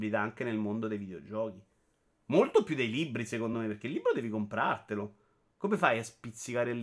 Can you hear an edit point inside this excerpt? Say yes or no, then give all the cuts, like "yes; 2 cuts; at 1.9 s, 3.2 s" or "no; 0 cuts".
no; 0 cuts